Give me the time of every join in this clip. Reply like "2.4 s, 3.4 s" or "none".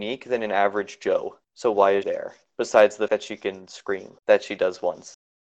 1.4 s, 2.0 s, 3.1 s, 4.2 s